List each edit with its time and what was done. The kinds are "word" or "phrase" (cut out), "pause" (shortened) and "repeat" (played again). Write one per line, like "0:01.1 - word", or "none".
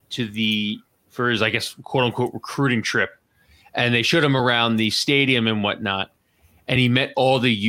none